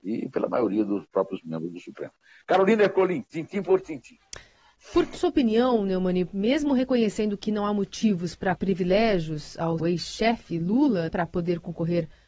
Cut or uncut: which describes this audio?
cut